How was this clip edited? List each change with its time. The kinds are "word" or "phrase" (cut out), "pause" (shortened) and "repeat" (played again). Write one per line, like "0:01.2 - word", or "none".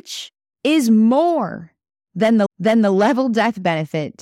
0:02.5 - repeat